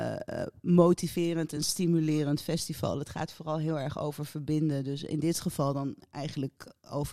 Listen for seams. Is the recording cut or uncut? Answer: uncut